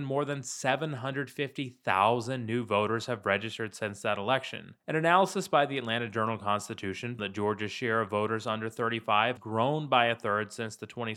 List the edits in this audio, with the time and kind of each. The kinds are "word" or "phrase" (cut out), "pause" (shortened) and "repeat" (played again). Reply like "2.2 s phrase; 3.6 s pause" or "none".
4.8 s pause; 7.2 s word; 9.4 s word